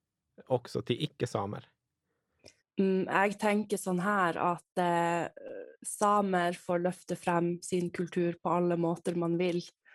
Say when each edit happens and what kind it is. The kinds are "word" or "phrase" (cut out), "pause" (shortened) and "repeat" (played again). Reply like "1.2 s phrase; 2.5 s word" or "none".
2.6 s pause